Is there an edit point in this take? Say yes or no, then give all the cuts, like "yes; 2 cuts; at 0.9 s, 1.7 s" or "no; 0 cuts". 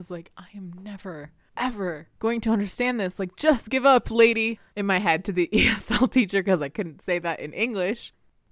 no; 0 cuts